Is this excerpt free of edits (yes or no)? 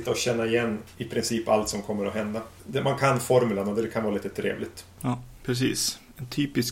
yes